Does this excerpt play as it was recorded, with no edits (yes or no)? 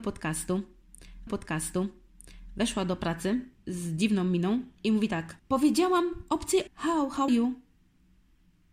no